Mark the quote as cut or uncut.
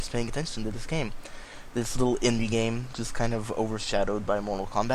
uncut